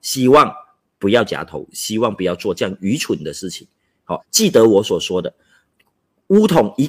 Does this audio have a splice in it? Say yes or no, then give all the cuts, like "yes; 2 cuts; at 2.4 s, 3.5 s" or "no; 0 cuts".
yes; 1 cut; at 4.2 s